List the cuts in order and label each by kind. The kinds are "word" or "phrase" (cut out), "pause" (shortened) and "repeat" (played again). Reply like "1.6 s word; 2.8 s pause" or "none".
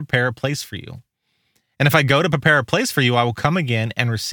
none